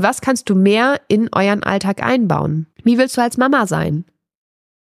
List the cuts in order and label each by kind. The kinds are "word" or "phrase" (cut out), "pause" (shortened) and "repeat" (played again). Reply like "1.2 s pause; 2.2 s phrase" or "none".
2.7 s pause